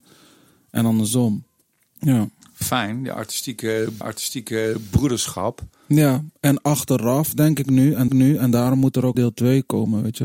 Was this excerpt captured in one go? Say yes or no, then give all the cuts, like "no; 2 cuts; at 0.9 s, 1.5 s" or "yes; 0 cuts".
no; 4 cuts; at 1.6 s, 4.0 s, 8.1 s, 9.1 s